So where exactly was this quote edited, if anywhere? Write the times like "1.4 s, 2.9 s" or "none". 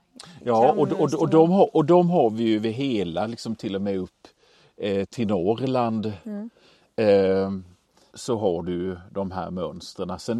8.1 s